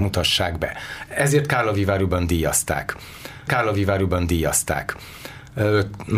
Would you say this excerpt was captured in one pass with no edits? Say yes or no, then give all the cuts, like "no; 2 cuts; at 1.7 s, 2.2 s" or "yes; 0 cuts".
no; 1 cut; at 3.5 s